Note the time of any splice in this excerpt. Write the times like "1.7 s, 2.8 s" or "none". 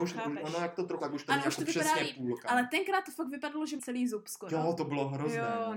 1.0 s, 3.8 s